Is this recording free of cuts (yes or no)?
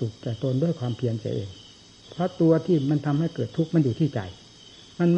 yes